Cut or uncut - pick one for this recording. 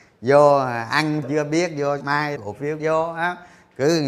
cut